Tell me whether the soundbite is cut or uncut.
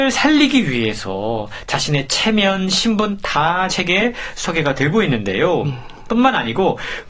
cut